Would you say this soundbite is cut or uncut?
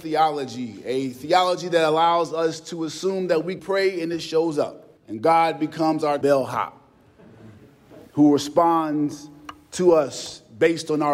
cut